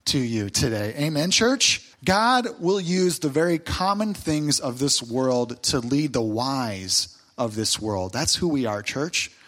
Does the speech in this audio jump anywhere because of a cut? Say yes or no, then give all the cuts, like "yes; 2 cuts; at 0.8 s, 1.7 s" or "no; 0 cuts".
yes; 1 cut; at 1.9 s